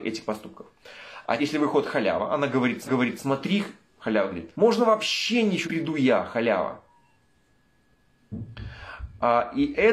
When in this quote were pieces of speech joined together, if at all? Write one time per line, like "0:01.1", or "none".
0:01.4
0:02.9
0:04.5
0:05.6